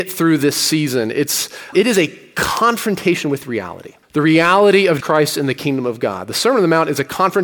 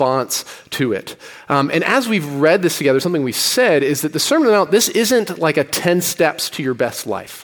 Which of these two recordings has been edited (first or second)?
first